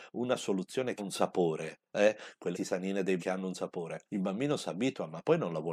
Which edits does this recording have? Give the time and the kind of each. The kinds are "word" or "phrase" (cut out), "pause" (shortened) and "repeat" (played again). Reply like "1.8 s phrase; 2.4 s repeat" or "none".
1.0 s word; 2.5 s word; 3.2 s word; 4.1 s word